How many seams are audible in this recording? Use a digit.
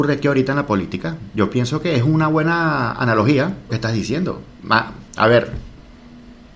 2